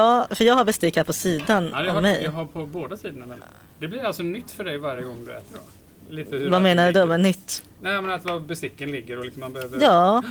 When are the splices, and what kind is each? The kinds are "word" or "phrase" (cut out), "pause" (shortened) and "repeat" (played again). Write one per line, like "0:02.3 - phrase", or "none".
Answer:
none